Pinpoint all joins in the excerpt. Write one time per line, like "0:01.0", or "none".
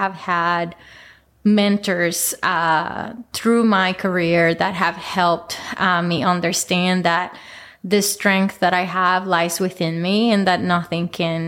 none